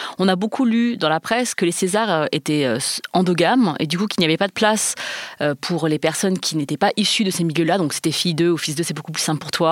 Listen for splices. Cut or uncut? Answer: uncut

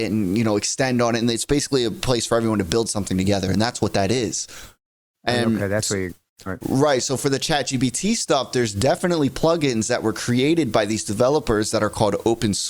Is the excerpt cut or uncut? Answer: uncut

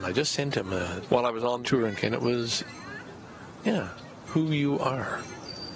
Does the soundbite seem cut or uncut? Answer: cut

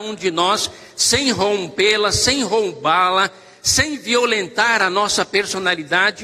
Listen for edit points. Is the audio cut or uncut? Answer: uncut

